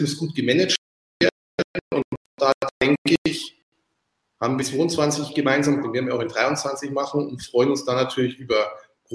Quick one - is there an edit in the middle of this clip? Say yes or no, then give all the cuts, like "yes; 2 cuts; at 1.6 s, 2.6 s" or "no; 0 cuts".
yes; 2 cuts; at 4.6 s, 5.8 s